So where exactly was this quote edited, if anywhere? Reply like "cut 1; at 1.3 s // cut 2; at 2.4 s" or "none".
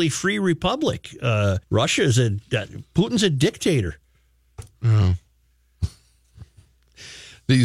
cut 1; at 1.6 s